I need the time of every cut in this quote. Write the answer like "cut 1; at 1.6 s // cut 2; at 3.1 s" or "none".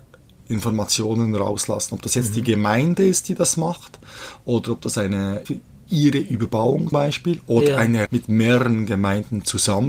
cut 1; at 5.4 s // cut 2; at 6.9 s // cut 3; at 8.1 s